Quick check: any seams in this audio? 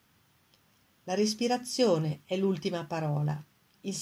no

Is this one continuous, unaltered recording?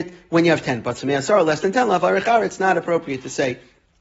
yes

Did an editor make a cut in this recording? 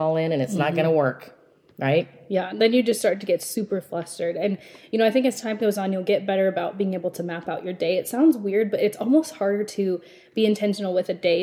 no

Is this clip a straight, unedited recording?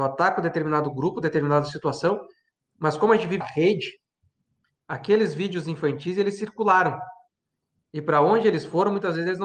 no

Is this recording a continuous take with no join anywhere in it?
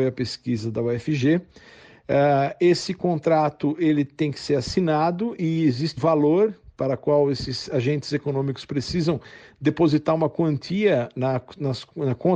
no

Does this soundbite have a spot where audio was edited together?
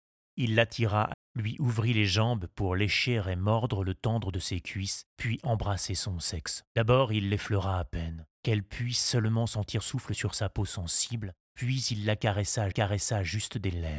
yes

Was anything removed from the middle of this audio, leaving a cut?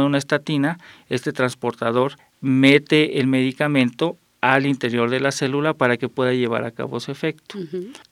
no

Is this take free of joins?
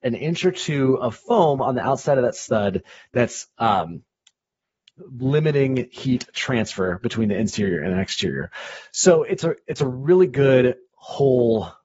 yes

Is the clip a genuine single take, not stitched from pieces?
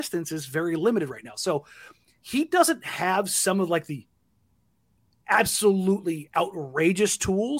yes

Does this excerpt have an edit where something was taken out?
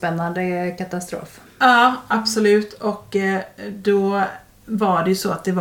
no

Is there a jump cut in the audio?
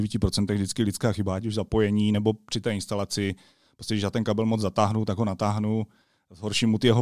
no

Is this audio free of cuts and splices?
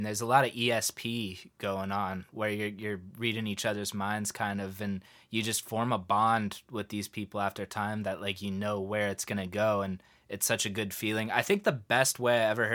yes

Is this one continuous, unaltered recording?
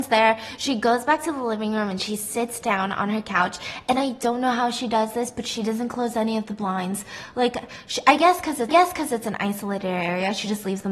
no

